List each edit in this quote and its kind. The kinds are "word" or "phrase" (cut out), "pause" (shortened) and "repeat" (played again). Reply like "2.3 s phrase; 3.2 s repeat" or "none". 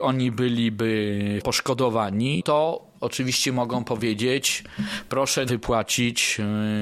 1.4 s word; 2.4 s word; 5.5 s word